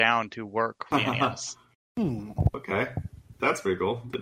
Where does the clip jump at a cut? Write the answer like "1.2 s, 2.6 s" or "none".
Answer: 0.9 s, 1.7 s

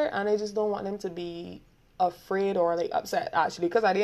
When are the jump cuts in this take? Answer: none

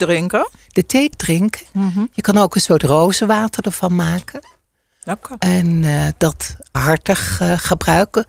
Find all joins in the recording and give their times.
1.1 s, 6.7 s

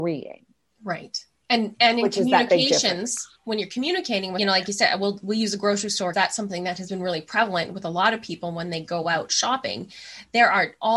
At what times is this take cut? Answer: 4.4 s, 6.1 s

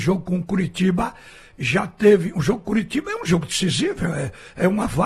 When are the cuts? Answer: none

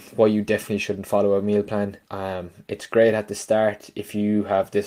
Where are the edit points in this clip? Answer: 2.0 s

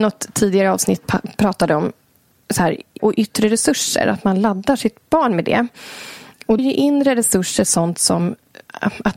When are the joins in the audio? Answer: 3.0 s, 6.6 s

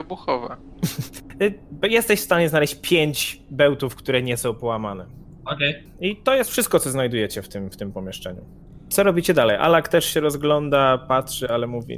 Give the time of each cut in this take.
none

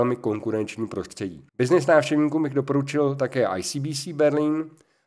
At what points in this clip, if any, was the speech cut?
1.5 s

